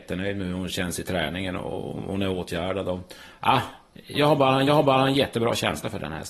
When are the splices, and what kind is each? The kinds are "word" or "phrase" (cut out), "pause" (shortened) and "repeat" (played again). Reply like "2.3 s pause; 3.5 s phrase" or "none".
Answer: 4.1 s word; 4.7 s repeat